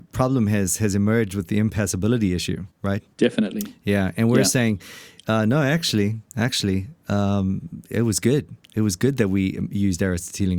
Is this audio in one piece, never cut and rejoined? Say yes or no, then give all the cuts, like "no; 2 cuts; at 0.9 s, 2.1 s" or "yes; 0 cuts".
no; 1 cut; at 2.7 s